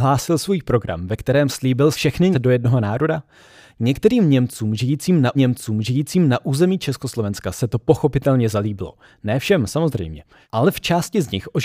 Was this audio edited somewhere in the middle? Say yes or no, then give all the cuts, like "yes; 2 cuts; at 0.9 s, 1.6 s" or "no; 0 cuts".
yes; 3 cuts; at 1.9 s, 2.3 s, 5.3 s